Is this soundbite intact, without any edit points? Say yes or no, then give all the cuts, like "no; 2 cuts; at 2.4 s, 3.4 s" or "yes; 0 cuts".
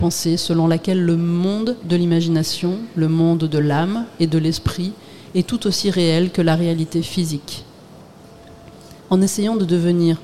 no; 1 cut; at 9.0 s